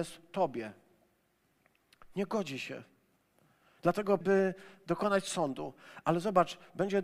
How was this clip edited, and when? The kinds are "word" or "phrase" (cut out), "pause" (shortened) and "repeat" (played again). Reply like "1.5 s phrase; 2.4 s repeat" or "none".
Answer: 4.2 s word